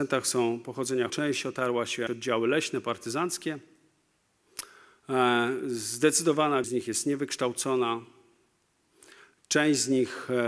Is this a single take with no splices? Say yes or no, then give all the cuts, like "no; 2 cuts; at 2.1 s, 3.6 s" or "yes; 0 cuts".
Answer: no; 3 cuts; at 1.1 s, 2.1 s, 6.6 s